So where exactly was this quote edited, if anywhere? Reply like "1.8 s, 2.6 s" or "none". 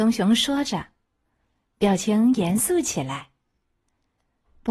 none